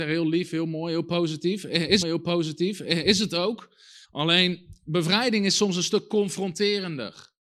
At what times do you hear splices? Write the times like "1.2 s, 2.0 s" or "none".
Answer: 2.0 s, 4.0 s